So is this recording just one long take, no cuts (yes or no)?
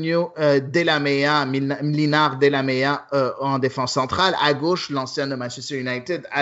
yes